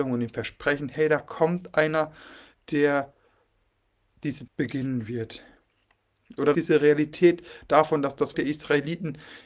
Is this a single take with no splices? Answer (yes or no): no